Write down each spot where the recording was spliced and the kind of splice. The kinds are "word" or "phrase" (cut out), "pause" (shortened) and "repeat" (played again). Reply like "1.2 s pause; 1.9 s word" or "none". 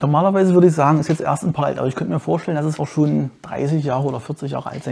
1.6 s word; 2.8 s word